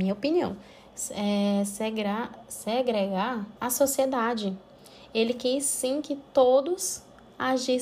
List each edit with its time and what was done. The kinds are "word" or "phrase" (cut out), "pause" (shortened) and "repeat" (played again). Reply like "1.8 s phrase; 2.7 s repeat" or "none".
3.6 s pause